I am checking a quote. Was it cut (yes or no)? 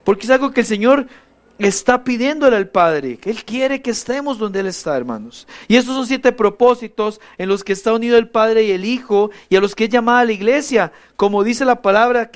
no